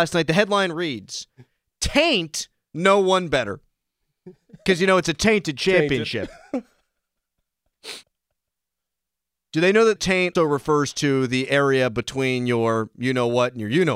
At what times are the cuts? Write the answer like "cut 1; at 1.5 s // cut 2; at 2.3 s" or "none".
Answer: cut 1; at 8.0 s // cut 2; at 10.0 s // cut 3; at 10.4 s

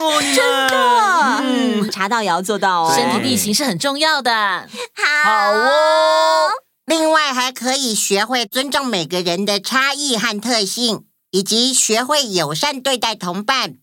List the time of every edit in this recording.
cut 1; at 1.9 s

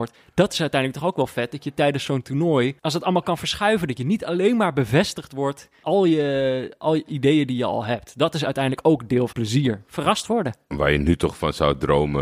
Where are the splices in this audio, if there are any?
cut 1; at 2.8 s // cut 2; at 5.8 s // cut 3; at 7.1 s // cut 4; at 9.3 s

